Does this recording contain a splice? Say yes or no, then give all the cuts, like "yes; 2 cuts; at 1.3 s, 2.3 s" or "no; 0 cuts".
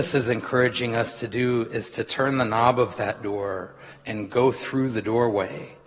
no; 0 cuts